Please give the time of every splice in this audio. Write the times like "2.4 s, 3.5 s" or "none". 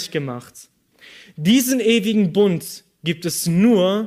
none